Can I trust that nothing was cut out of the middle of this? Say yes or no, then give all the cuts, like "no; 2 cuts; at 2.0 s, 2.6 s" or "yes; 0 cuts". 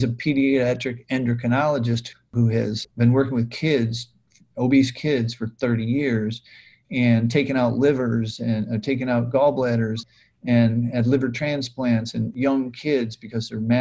yes; 0 cuts